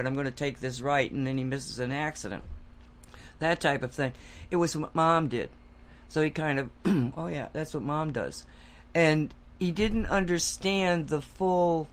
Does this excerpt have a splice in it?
no; 0 cuts

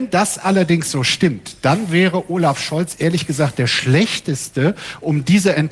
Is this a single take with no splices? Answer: yes; 0 cuts

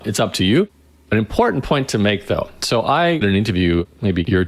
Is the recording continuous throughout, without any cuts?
no; 1 cut; at 3.2 s

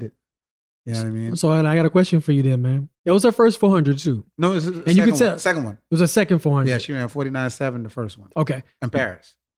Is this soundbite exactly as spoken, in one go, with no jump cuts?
no; 1 cut; at 2.9 s

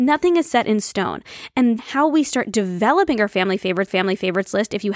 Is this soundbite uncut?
no; 2 cuts; at 1.8 s, 3.9 s

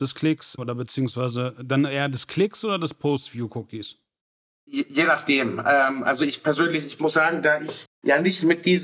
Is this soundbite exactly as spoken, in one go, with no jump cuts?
yes; 0 cuts

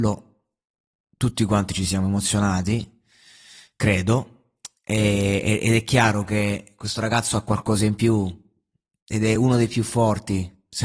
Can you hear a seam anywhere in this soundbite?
no; 0 cuts

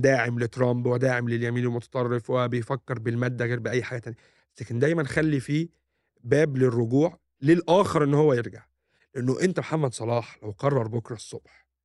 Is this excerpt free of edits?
yes; 0 cuts

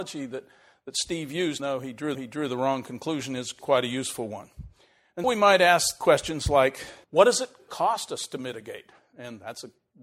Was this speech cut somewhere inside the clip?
yes; 6 cuts; at 1.6 s, 2.1 s, 3.6 s, 5.2 s, 7.0 s, 7.7 s

